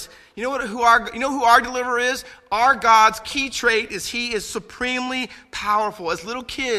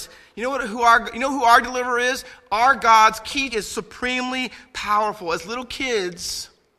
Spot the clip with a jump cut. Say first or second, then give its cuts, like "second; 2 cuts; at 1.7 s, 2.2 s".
second; 1 cut; at 3.5 s